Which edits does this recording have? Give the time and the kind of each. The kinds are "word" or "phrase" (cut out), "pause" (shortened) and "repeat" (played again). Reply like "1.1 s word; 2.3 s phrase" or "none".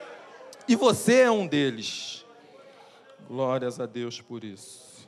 none